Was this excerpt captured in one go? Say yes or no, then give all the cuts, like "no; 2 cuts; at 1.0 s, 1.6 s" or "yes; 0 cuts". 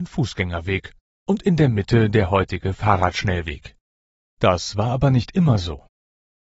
yes; 0 cuts